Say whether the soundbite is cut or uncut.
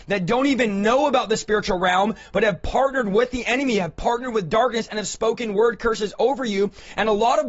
uncut